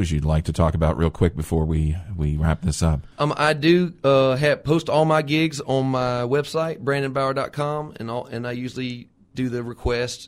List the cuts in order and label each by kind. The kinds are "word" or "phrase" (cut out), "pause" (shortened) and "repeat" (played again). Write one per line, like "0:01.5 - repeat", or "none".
0:03.1 - pause

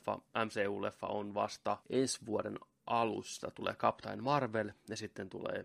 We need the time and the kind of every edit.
0:01.8 - pause

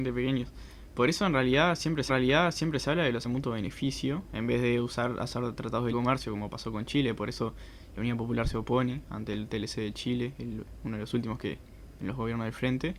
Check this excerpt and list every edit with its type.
0:02.1 - repeat
0:03.2 - word
0:05.9 - word

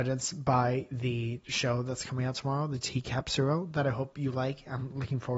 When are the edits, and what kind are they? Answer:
none

